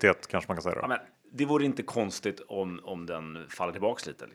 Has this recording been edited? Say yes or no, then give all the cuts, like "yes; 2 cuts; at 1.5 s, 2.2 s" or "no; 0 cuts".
yes; 1 cut; at 1.1 s